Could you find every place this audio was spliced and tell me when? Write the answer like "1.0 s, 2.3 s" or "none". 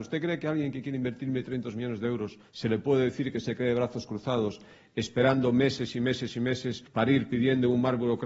2.5 s, 6.9 s

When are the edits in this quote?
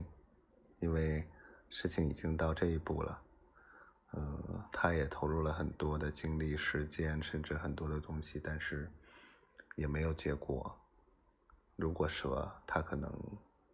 none

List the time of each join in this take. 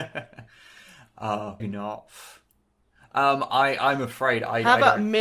1.6 s

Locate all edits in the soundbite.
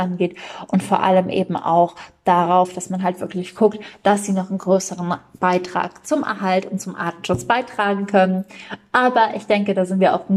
none

